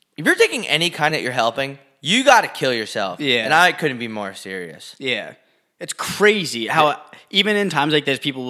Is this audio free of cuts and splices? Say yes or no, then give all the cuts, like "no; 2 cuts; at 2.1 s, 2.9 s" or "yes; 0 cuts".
no; 1 cut; at 1.1 s